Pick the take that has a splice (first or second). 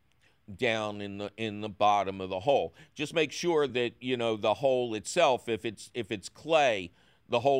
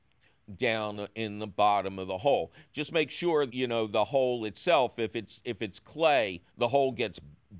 second